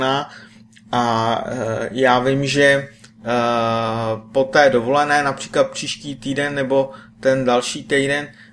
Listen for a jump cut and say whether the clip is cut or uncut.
uncut